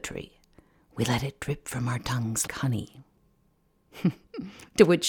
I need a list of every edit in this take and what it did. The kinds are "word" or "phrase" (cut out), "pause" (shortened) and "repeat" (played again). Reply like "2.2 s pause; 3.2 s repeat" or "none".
2.5 s word